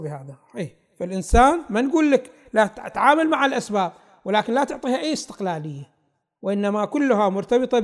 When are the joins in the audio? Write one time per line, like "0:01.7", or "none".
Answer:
none